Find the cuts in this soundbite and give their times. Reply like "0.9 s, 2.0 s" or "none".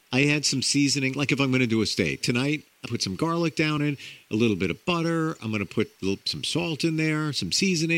2.2 s, 2.9 s, 3.8 s